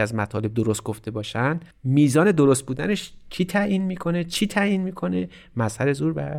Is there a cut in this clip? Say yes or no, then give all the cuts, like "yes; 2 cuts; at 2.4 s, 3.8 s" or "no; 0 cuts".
no; 0 cuts